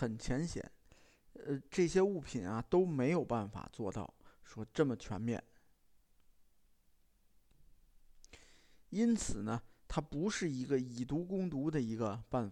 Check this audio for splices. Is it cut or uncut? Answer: uncut